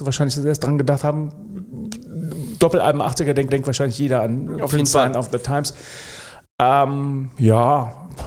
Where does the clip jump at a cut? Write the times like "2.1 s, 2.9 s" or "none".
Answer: 3.5 s

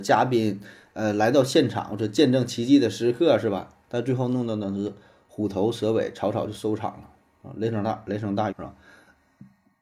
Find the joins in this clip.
8.5 s

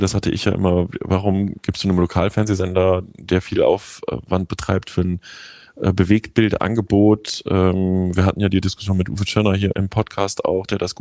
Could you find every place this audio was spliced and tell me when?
9.7 s

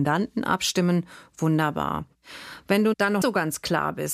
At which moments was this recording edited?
3.2 s

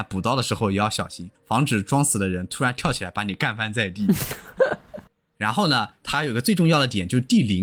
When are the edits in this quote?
1.3 s

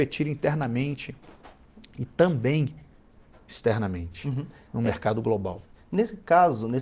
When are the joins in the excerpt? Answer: none

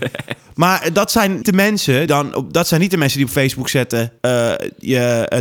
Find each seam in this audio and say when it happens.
1.4 s, 2.1 s, 4.2 s

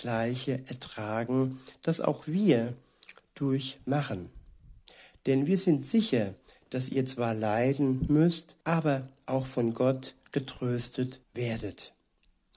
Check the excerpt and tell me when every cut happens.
8.6 s, 11.2 s

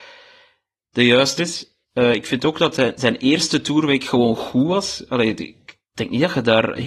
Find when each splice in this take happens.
1.4 s, 1.8 s

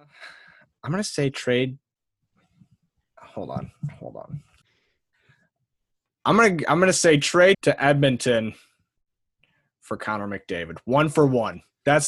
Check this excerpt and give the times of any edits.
7.5 s

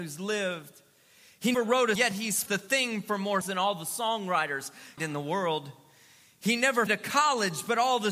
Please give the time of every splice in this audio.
1.5 s, 2.0 s, 2.5 s, 3.4 s, 5.0 s, 6.9 s

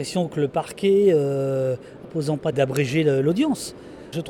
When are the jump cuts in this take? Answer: 2.0 s, 2.5 s

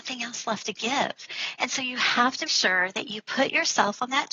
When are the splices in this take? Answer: 2.5 s

